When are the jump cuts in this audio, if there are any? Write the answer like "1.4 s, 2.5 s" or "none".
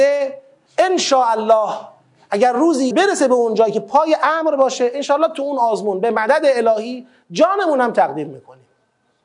2.9 s